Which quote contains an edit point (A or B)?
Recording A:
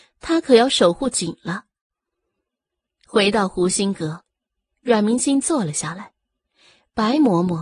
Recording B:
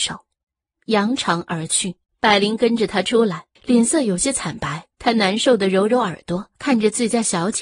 B